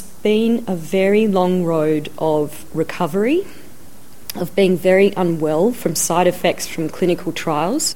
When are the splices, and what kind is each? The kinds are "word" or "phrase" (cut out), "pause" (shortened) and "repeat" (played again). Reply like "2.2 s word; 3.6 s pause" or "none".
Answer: none